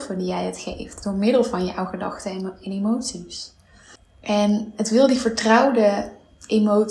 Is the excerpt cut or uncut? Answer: uncut